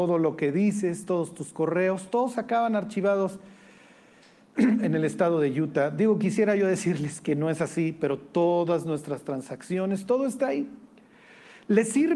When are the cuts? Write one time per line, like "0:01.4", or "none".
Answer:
none